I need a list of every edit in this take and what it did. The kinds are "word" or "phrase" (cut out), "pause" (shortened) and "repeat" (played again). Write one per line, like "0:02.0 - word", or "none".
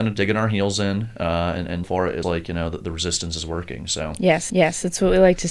0:01.8 - word
0:02.2 - word
0:04.5 - repeat